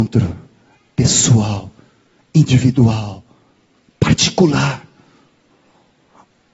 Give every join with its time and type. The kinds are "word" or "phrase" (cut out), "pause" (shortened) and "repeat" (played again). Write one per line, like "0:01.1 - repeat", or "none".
none